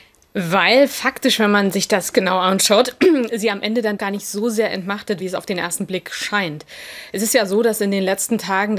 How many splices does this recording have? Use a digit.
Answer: 3